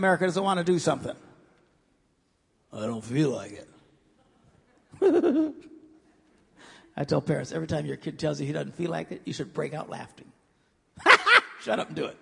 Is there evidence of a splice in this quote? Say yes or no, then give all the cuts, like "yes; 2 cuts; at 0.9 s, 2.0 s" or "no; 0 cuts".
no; 0 cuts